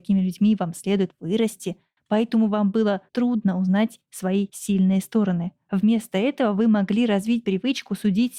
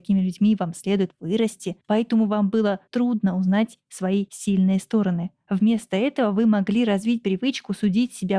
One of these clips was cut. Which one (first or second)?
second